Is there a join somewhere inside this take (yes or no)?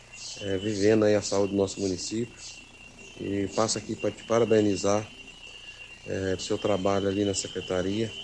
yes